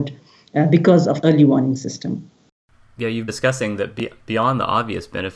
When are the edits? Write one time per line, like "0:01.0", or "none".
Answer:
0:01.2
0:03.3